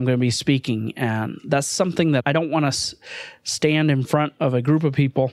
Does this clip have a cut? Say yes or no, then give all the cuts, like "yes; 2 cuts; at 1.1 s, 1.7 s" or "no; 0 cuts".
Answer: no; 0 cuts